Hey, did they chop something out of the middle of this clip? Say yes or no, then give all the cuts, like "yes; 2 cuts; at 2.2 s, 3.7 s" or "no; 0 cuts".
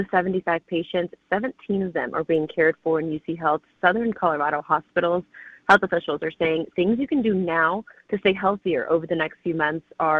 no; 0 cuts